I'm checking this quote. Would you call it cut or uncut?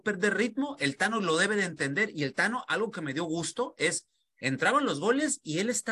uncut